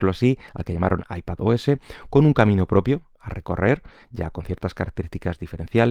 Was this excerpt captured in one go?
yes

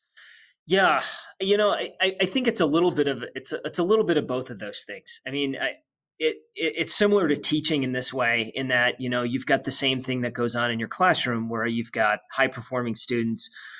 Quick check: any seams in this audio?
no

